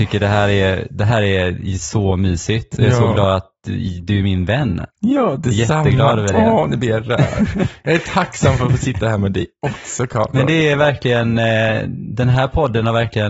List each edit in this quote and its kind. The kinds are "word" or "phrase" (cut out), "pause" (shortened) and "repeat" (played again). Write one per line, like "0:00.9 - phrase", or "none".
none